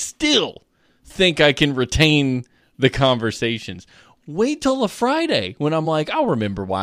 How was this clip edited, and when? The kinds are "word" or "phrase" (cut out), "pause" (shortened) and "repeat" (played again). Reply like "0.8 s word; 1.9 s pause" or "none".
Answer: none